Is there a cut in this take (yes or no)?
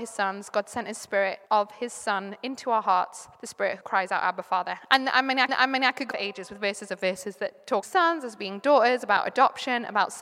yes